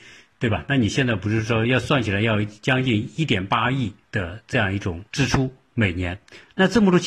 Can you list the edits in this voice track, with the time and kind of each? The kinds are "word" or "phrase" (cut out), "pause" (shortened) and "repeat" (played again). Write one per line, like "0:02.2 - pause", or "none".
0:04.0 - pause
0:05.1 - pause